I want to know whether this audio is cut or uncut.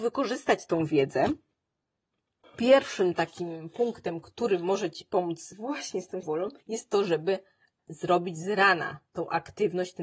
cut